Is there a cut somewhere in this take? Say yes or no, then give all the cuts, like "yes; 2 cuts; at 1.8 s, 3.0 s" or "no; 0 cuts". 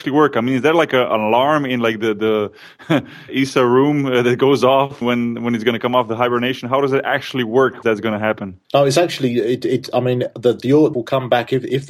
yes; 5 cuts; at 3.3 s, 5.0 s, 7.8 s, 8.6 s, 10.9 s